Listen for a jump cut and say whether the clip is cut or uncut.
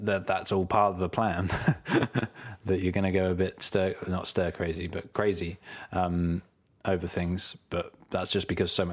uncut